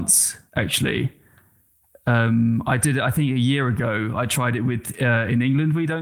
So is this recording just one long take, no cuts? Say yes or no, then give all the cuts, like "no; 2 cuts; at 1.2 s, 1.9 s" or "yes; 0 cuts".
yes; 0 cuts